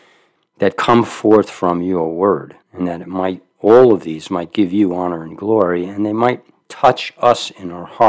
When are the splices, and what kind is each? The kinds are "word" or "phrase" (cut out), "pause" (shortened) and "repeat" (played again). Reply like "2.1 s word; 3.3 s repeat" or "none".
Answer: 2.6 s pause